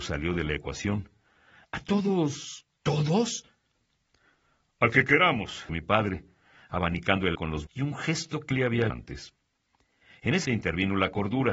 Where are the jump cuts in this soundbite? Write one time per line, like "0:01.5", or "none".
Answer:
0:05.7
0:07.3
0:07.7
0:08.5
0:08.9
0:10.4